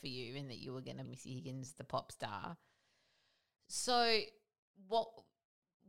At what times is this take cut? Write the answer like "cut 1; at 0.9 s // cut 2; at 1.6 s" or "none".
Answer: cut 1; at 1.0 s